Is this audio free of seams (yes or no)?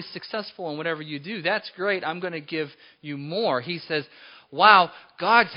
yes